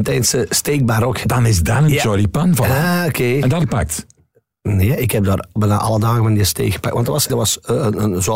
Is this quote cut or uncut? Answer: cut